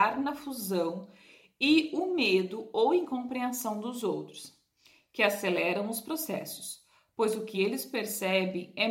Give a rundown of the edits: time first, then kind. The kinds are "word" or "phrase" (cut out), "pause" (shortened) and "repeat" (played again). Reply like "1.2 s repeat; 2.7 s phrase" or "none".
none